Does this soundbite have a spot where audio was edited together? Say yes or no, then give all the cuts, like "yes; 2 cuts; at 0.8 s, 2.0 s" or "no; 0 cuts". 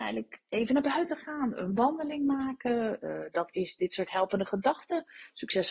no; 0 cuts